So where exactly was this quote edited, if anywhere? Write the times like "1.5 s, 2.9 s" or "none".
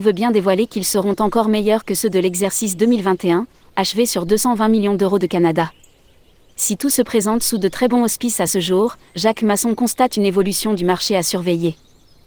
none